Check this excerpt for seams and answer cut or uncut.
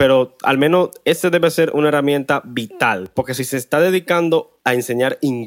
uncut